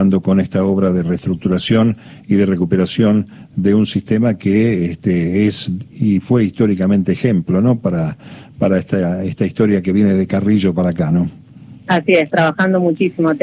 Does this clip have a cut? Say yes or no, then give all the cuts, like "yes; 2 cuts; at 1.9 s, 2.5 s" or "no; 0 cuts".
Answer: no; 0 cuts